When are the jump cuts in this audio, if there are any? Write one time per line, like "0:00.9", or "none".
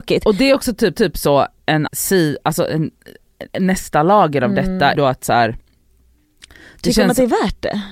0:00.9
0:01.9
0:03.5
0:04.9